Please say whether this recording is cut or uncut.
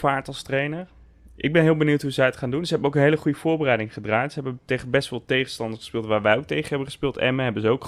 uncut